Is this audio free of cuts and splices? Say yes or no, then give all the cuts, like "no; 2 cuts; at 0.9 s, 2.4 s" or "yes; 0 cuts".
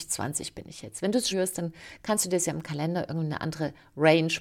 no; 1 cut; at 1.3 s